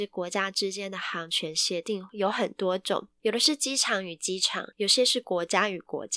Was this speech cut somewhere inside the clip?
yes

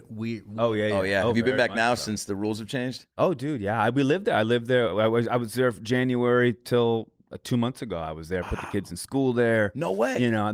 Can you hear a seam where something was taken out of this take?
yes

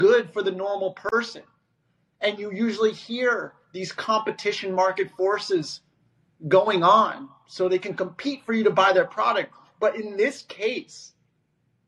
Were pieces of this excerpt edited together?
no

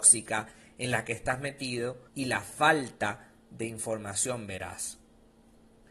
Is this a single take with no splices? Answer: no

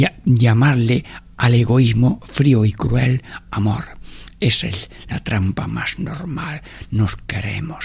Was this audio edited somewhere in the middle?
no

